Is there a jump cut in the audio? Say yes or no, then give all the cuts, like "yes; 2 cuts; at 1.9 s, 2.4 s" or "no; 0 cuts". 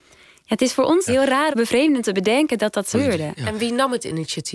yes; 4 cuts; at 1.1 s, 1.5 s, 2.0 s, 2.9 s